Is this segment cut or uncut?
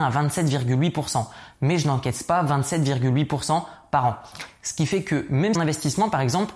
cut